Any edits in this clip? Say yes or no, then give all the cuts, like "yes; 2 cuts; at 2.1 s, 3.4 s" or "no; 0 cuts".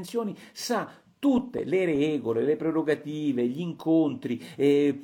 no; 0 cuts